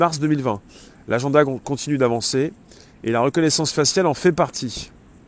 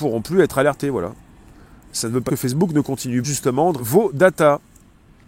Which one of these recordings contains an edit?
second; 3 cuts; at 2.3 s, 3.2 s, 3.8 s

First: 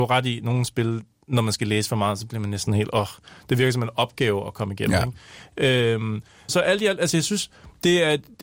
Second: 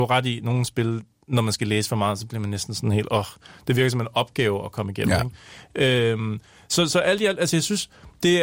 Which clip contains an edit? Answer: first; 2 cuts; at 2.7 s, 6.5 s

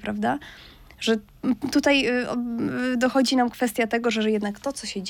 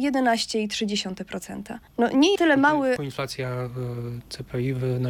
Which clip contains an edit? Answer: second; 3 cuts; at 1.9 s, 2.4 s, 3.0 s

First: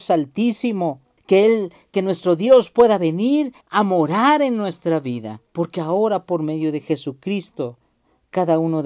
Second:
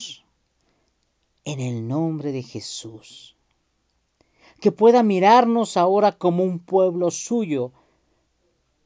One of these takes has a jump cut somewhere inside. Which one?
first; 3 cuts; at 1.2 s, 3.6 s, 5.5 s

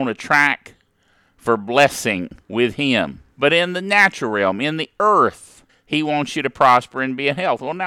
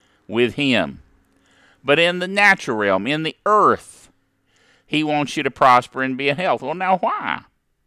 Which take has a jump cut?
first; 3 cuts; at 2.4 s, 3.3 s, 5.7 s

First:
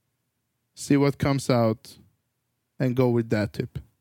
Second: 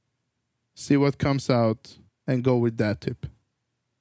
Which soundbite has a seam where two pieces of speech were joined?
second; 1 cut; at 2.1 s

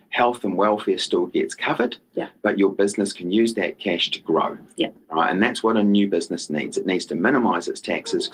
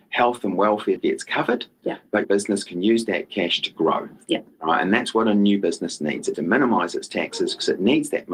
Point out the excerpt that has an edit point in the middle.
second; 3 cuts; at 1.0 s, 2.2 s, 6.3 s

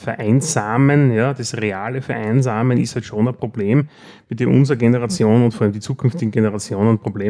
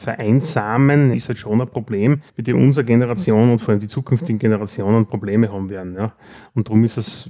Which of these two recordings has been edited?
second; 2 cuts; at 1.1 s, 2.3 s

